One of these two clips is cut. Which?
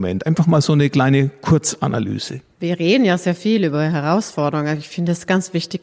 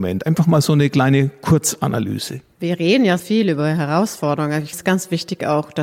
second; 2 cuts; at 3.2 s, 4.7 s

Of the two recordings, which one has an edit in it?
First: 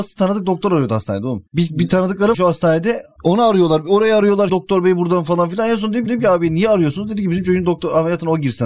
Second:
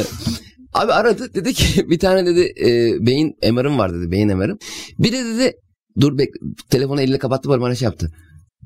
first; 4 cuts; at 1.5 s, 2.3 s, 4.5 s, 6.1 s

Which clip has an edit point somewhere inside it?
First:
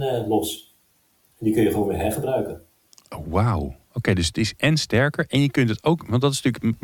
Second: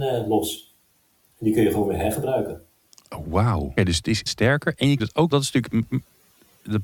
second; 4 cuts; at 3.8 s, 4.3 s, 5.0 s, 5.3 s

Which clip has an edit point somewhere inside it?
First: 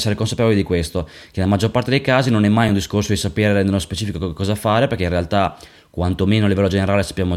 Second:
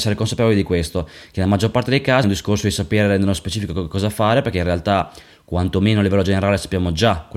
second; 1 cut; at 2.2 s

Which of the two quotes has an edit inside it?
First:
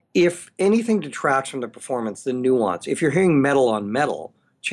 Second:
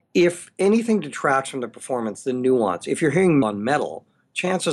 second; 1 cut; at 3.4 s

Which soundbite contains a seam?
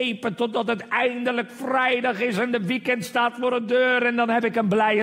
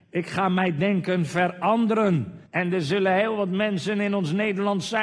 second; 1 cut; at 2.5 s

